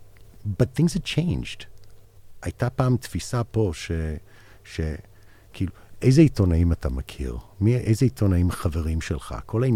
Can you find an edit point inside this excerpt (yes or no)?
no